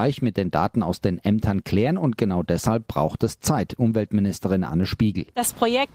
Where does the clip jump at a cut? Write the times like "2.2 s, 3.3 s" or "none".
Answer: none